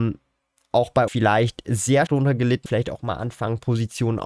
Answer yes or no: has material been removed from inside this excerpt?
yes